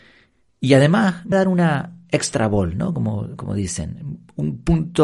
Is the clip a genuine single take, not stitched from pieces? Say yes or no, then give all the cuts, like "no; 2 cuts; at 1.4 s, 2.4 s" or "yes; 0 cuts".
no; 1 cut; at 1.3 s